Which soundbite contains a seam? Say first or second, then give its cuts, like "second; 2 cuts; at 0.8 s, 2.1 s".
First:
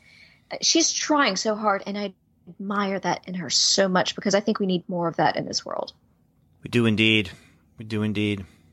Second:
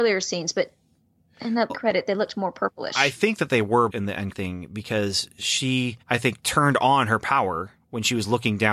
second; 4 cuts; at 1.7 s, 3.9 s, 4.3 s, 6.0 s